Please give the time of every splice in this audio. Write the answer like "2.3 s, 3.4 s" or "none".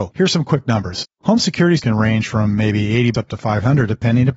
1.8 s, 3.1 s